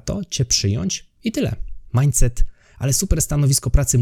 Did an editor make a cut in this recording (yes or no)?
no